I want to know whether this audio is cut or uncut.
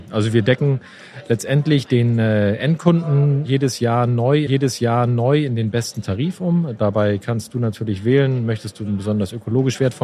cut